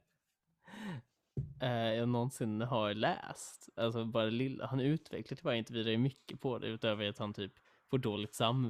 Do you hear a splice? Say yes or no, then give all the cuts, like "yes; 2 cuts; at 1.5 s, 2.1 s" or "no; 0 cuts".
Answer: no; 0 cuts